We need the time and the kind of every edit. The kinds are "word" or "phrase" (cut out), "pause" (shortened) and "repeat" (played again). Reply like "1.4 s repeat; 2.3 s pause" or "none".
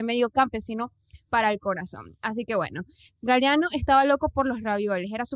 none